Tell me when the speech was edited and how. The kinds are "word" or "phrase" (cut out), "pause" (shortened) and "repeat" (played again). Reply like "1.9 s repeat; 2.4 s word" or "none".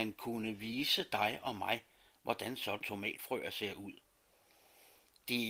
2.8 s word